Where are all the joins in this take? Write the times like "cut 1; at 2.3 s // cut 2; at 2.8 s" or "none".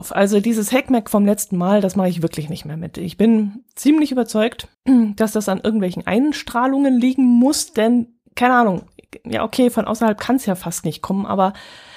cut 1; at 4.7 s // cut 2; at 8.3 s

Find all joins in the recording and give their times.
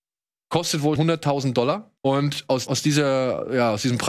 cut 1; at 1.0 s // cut 2; at 2.0 s // cut 3; at 2.7 s

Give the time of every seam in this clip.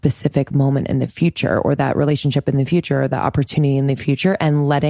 none

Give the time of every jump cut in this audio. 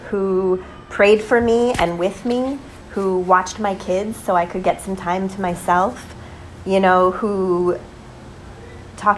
none

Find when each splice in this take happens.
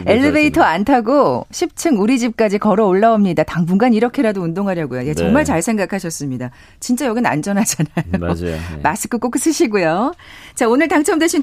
none

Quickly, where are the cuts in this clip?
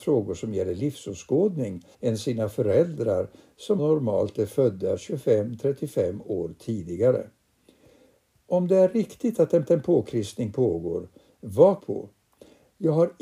cut 1; at 1.9 s // cut 2; at 3.8 s // cut 3; at 9.7 s // cut 4; at 11.8 s

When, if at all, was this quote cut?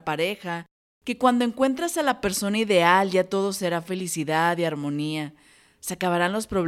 none

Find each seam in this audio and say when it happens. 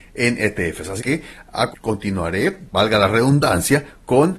cut 1; at 1.0 s // cut 2; at 1.7 s

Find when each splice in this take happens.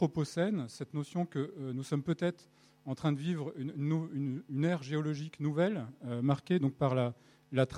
none

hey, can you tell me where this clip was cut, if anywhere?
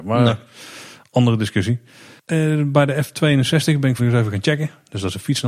cut 1; at 4.0 s

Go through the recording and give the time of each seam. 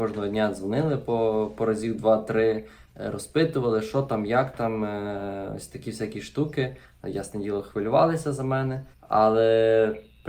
cut 1; at 8.9 s

